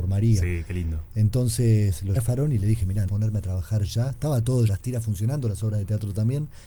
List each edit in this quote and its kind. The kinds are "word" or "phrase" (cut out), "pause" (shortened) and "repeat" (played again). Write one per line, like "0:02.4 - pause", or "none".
0:02.2 - word
0:03.1 - word
0:04.7 - phrase